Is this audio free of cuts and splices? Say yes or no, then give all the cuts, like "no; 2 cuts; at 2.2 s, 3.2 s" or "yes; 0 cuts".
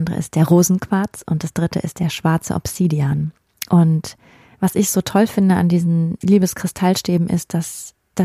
yes; 0 cuts